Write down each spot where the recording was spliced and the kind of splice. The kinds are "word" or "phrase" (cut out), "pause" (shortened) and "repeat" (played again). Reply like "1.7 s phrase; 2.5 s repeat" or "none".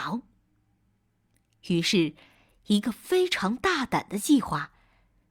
none